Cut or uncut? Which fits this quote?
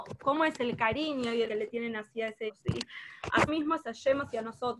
cut